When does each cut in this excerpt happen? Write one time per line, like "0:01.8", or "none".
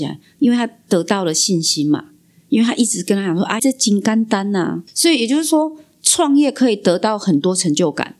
0:03.6